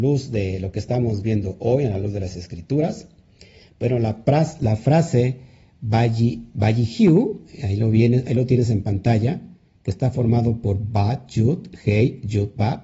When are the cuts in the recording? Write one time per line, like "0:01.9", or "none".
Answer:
none